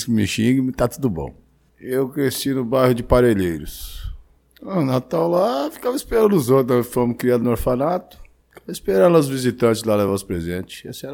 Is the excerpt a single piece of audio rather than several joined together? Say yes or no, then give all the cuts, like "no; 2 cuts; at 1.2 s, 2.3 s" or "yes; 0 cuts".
yes; 0 cuts